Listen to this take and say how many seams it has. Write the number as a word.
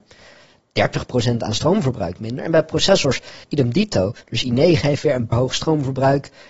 three